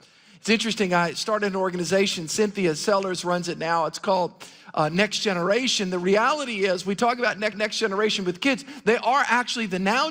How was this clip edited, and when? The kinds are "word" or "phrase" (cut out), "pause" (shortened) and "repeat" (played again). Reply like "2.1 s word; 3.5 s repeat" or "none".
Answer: 7.5 s repeat